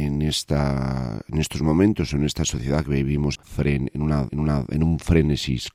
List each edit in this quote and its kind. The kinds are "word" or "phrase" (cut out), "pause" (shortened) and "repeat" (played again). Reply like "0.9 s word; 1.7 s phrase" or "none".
3.4 s phrase; 4.3 s repeat

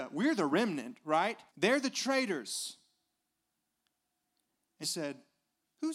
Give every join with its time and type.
1.5 s pause; 4.8 s word

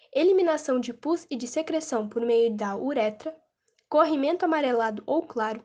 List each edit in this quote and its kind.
none

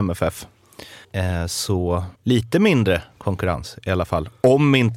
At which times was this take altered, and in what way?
1.0 s pause; 2.2 s pause

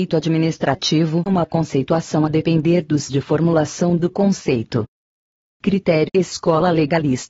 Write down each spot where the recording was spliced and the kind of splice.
1.3 s word; 3.1 s word; 4.1 s word; 6.1 s word

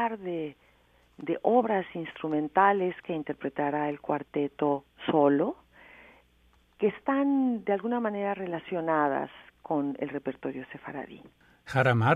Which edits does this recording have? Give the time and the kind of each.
none

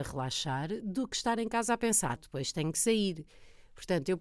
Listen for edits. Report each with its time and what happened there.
2.2 s word

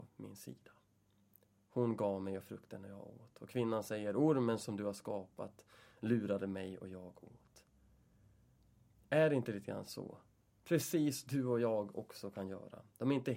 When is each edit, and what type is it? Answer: none

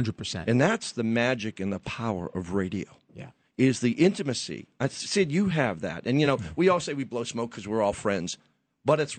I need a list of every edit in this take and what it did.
none

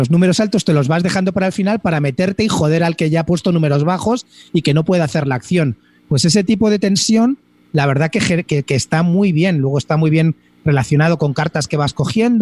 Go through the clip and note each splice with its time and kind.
none

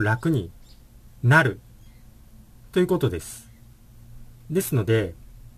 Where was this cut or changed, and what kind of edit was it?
none

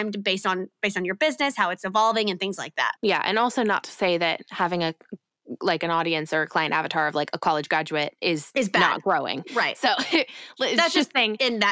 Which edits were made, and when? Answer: 3.0 s pause

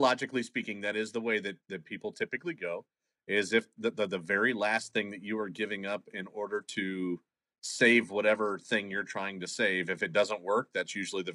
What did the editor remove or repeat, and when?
none

